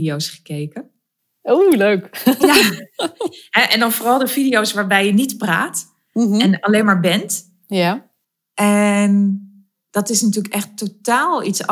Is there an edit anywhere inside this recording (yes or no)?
yes